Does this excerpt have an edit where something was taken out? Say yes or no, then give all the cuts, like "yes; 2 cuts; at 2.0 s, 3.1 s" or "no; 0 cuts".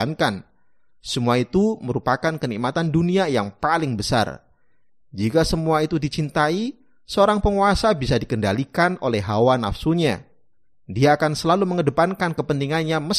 no; 0 cuts